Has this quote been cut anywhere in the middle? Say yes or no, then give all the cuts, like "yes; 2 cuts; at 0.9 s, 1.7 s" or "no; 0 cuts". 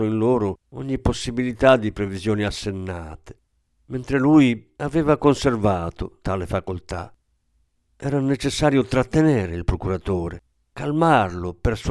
no; 0 cuts